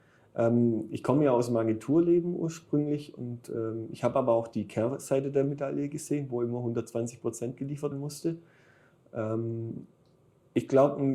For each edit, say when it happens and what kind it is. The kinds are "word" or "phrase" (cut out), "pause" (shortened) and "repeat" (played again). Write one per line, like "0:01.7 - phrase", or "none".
0:07.9 - word